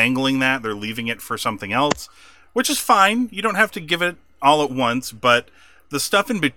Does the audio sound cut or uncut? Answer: uncut